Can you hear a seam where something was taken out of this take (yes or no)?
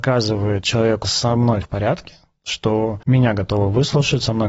yes